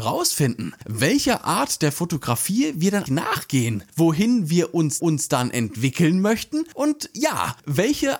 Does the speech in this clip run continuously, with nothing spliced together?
no; 2 cuts; at 3.1 s, 5.0 s

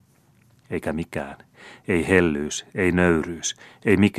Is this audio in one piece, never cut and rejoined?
yes; 0 cuts

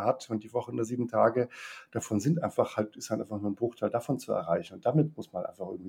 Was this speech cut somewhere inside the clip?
no; 0 cuts

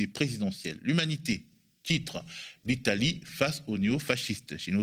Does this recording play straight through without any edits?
yes; 0 cuts

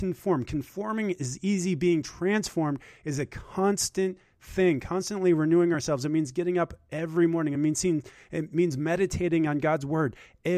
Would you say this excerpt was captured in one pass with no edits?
yes; 0 cuts

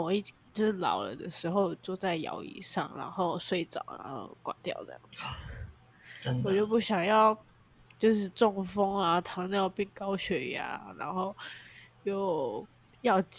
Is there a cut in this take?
no; 0 cuts

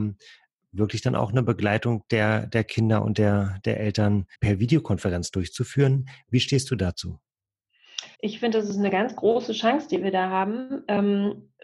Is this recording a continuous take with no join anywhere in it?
no; 2 cuts; at 4.3 s, 8.1 s

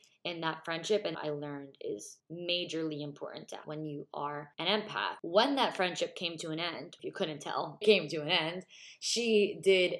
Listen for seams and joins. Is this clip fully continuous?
no; 4 cuts; at 1.1 s, 3.6 s, 7.0 s, 7.8 s

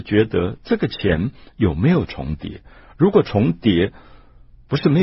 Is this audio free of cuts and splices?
yes; 0 cuts

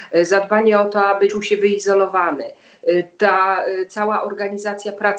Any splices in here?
yes; 1 cut; at 1.3 s

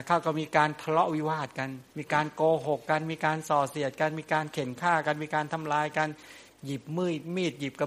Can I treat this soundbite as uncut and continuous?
no; 1 cut; at 1.9 s

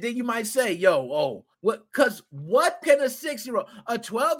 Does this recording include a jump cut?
yes; 2 cuts; at 1.5 s, 2.8 s

